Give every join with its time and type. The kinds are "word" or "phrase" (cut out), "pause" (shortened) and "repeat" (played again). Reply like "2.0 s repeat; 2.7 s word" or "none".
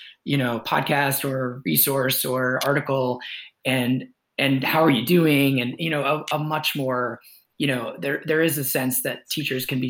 none